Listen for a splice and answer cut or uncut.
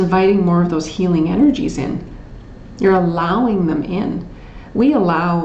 uncut